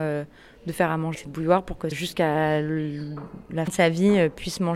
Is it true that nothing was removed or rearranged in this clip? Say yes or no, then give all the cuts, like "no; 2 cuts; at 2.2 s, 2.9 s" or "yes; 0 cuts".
no; 3 cuts; at 1.1 s, 1.9 s, 3.7 s